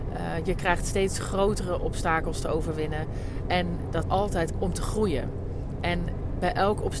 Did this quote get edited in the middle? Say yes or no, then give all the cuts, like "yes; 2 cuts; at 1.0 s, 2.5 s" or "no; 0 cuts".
yes; 2 cuts; at 4.0 s, 4.5 s